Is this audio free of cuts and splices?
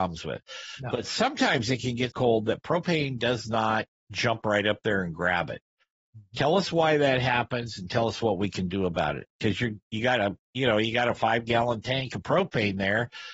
no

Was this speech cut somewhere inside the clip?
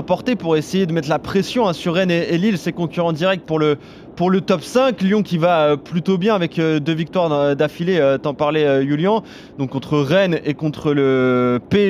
no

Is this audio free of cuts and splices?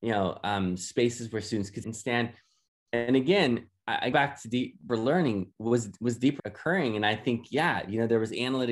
no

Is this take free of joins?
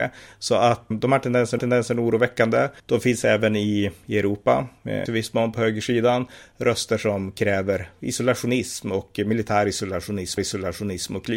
no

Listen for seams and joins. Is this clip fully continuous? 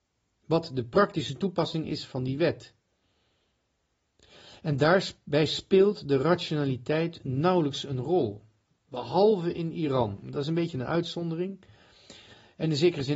yes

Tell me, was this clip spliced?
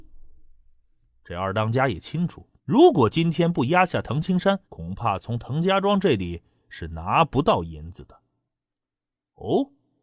yes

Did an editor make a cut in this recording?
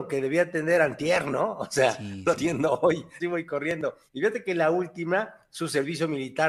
yes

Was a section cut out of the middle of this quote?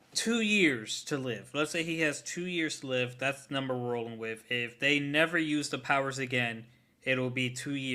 no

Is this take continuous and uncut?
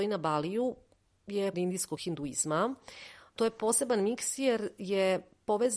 no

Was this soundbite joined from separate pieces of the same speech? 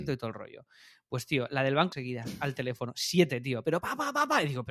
yes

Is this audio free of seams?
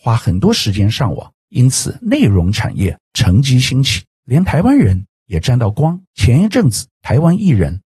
no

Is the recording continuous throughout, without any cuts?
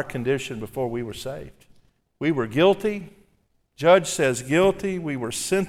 no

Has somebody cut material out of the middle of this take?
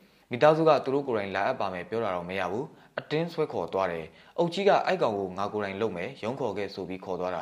no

